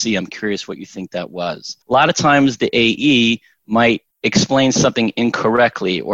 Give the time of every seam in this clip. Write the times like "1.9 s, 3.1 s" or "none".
1.8 s, 4.1 s